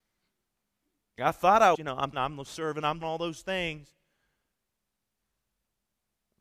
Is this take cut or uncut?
cut